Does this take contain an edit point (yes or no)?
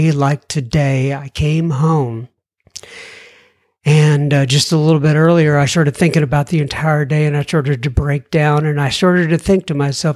no